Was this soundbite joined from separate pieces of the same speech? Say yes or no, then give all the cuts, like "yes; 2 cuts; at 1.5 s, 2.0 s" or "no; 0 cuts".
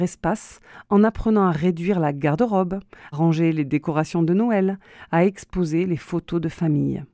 yes; 1 cut; at 3.1 s